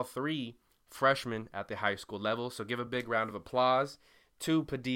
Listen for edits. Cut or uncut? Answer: uncut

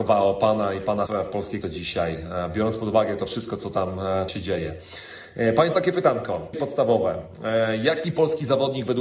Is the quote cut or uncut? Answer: cut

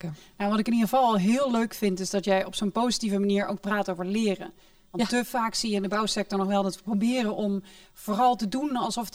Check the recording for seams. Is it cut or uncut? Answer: uncut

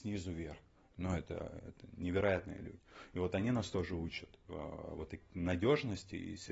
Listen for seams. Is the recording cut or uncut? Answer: uncut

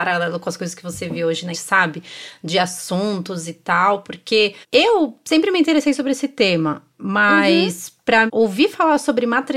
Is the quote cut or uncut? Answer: cut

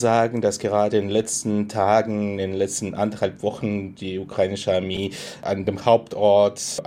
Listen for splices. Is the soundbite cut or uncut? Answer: uncut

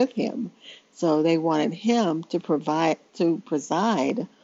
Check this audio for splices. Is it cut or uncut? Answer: uncut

